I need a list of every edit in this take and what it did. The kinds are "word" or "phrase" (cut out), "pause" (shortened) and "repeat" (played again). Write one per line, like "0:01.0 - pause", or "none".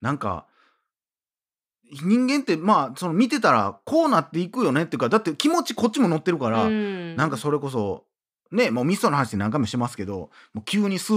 none

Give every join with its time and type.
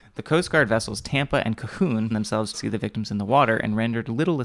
0:02.1 - word
0:02.5 - phrase

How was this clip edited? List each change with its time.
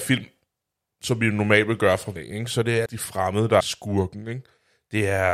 0:02.2 - word
0:02.9 - word
0:03.6 - word

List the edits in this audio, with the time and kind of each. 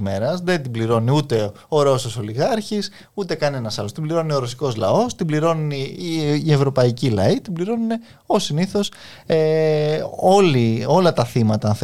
none

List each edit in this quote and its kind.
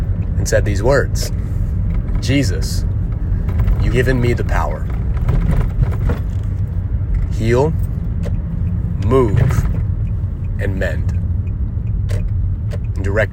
0:03.9 - word

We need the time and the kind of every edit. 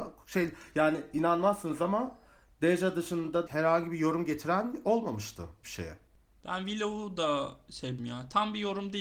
0:03.5 - word
0:05.6 - word
0:08.0 - word

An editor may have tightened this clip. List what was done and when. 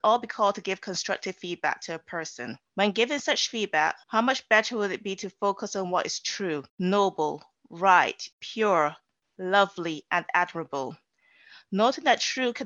0:02.7 - pause
0:04.0 - pause
0:06.7 - pause
0:08.3 - pause

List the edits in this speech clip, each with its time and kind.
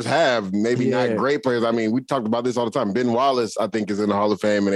none

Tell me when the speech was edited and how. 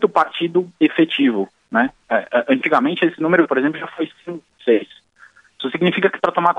none

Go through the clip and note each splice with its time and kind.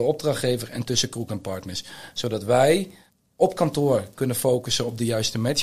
0:03.1 - pause

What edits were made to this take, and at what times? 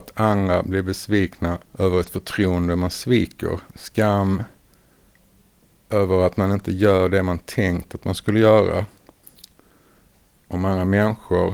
0:01.7 - pause
0:03.7 - pause

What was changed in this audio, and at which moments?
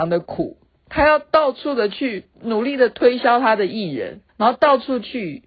0:02.3 - pause
0:04.3 - pause

